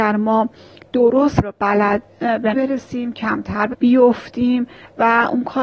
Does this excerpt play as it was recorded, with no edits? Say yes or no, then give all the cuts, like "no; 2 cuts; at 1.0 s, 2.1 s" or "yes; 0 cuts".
no; 4 cuts; at 1.4 s, 2.1 s, 2.5 s, 3.7 s